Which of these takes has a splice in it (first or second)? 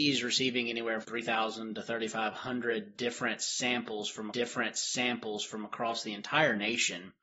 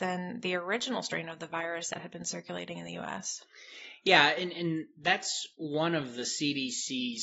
first